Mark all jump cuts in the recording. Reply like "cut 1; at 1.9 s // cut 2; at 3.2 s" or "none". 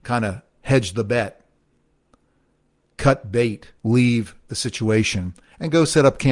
cut 1; at 3.8 s